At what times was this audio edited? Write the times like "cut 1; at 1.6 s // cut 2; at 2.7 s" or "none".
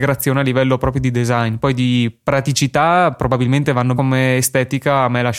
cut 1; at 4.0 s